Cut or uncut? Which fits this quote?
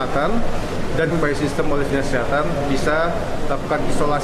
cut